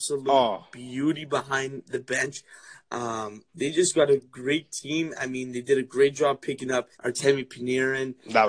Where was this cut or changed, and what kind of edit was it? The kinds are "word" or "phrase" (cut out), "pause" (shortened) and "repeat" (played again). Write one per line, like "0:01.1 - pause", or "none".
0:06.9 - pause